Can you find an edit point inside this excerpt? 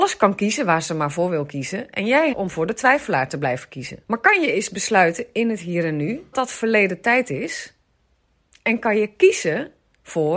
yes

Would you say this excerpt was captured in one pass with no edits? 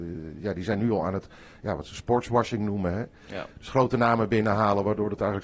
yes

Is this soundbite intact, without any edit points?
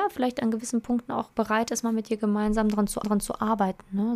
no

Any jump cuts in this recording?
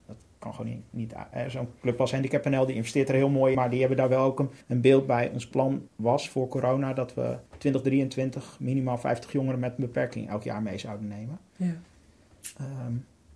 yes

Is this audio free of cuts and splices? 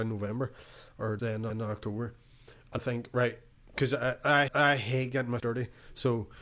no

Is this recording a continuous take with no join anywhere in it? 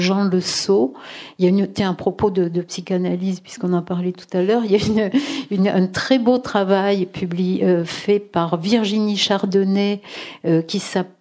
yes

